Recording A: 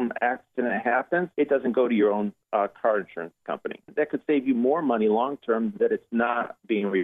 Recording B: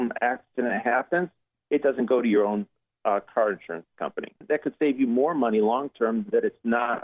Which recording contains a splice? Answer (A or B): A